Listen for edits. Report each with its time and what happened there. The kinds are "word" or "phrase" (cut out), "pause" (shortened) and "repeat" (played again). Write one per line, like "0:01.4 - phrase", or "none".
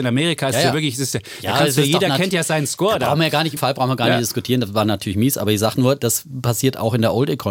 0:03.6 - word